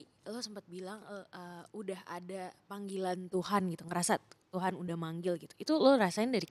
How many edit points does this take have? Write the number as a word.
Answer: zero